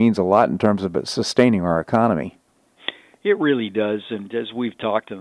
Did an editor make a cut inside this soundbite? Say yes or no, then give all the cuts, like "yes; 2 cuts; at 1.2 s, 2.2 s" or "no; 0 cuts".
no; 0 cuts